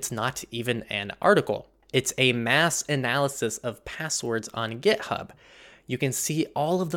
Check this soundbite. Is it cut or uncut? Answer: uncut